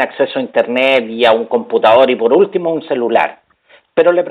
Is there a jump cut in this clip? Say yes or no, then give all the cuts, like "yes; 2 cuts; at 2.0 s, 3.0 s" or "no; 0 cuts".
no; 0 cuts